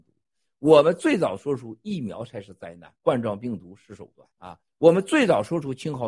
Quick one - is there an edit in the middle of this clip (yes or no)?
yes